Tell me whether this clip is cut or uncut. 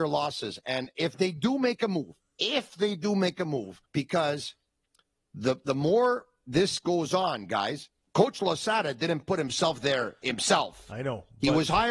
cut